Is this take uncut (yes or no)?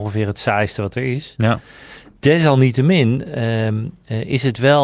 yes